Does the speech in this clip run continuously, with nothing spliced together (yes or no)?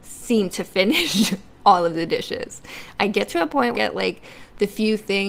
no